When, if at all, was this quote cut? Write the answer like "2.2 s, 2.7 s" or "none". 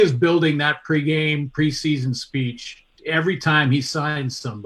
3.0 s